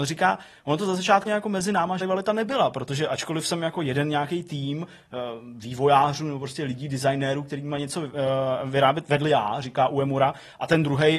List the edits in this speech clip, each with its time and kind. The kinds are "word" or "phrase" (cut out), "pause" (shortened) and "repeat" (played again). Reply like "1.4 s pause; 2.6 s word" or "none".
1.2 s word; 2.0 s word

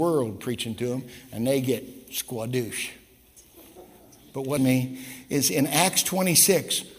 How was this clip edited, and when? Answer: 4.6 s word

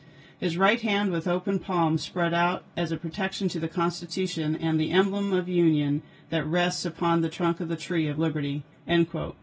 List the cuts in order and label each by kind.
none

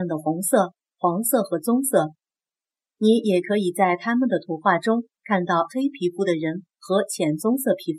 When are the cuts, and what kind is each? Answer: 5.1 s pause

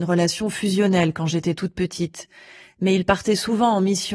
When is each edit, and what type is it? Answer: none

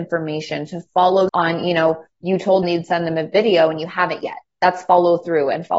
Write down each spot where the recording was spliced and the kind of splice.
1.3 s word; 2.6 s word

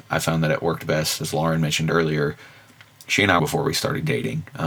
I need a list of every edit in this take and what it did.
3.4 s phrase

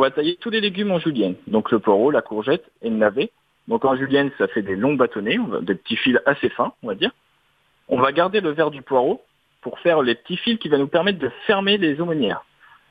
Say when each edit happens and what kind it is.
none

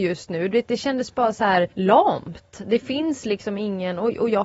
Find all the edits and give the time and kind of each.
1.7 s pause

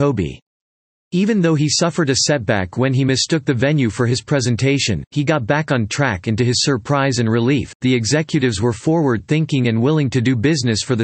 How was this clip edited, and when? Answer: none

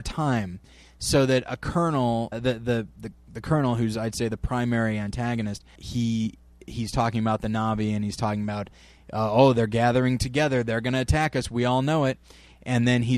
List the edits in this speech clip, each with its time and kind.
2.3 s word; 5.8 s word

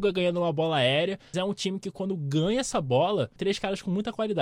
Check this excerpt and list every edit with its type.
1.3 s word; 3.4 s phrase

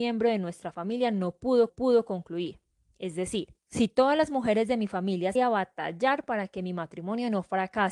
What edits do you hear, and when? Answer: 1.7 s repeat; 3.6 s pause; 5.4 s phrase

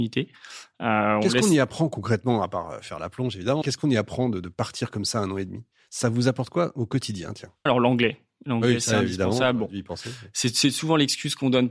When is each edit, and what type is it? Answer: 3.6 s word; 7.7 s phrase

